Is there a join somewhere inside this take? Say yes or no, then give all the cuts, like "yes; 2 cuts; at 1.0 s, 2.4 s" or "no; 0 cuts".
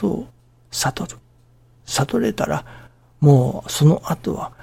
no; 0 cuts